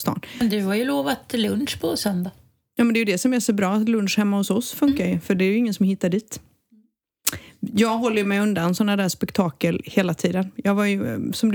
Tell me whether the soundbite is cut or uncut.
uncut